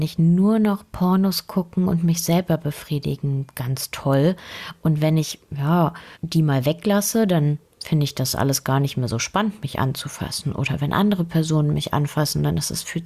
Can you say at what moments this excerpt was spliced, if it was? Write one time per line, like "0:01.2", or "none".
0:06.2